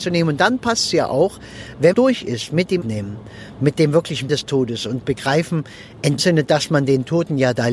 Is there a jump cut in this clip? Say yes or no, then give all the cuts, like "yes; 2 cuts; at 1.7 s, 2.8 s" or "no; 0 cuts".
yes; 4 cuts; at 1.9 s, 2.8 s, 4.3 s, 6.2 s